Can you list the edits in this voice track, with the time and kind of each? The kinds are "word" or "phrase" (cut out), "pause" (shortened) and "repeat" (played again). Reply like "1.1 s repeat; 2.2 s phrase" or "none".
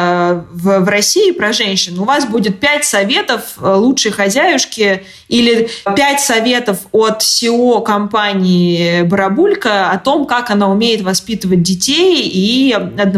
none